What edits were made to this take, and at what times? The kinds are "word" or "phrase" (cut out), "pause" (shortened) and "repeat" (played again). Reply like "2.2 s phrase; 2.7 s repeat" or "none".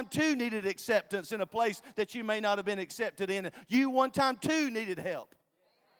none